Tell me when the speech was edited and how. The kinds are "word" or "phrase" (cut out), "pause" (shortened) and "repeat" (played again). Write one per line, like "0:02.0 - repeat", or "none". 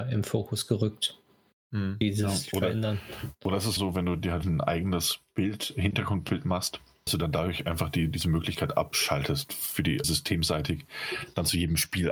0:03.8 - word
0:04.4 - word
0:07.1 - word
0:10.0 - word